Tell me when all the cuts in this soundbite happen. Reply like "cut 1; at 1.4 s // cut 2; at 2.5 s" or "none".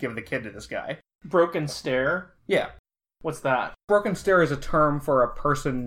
cut 1; at 2.4 s // cut 2; at 3.8 s